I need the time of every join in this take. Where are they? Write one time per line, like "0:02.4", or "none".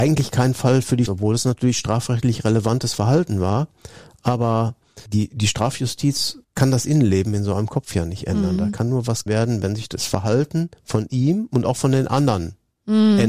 0:01.1
0:05.1
0:06.4
0:09.3

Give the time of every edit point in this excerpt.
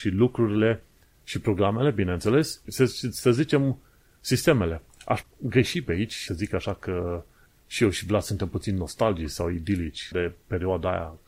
0:02.7
0:05.2
0:06.3
0:10.1

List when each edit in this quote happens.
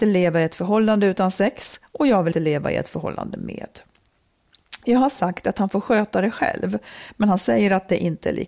0:02.3

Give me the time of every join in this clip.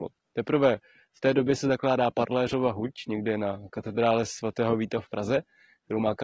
none

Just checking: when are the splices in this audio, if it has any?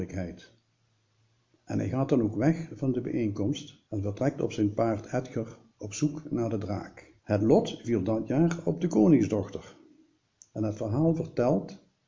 0:03.9
0:07.2

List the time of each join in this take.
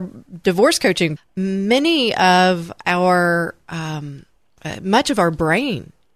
0:01.2

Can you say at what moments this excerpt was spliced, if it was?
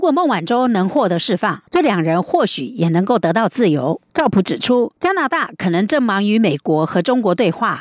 0:01.7
0:04.1
0:05.0

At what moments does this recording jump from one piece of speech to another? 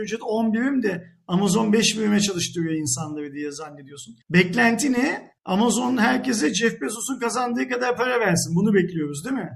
0:04.2
0:05.4

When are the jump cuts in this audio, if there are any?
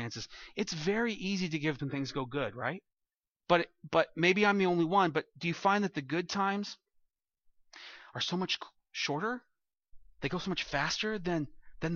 0:01.8

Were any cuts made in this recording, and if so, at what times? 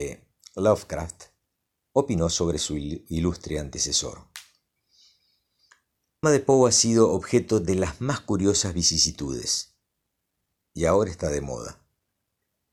0:06.2

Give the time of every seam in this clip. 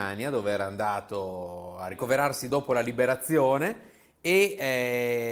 none

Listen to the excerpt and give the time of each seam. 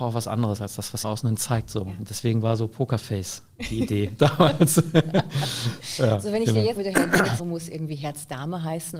0:01.0
0:06.8
0:07.4

